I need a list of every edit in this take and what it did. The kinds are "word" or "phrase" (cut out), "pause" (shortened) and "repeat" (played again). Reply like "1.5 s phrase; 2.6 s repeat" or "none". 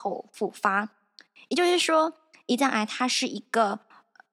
none